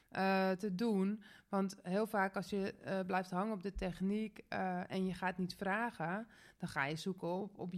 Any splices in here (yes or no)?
no